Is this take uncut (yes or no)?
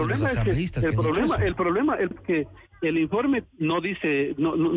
no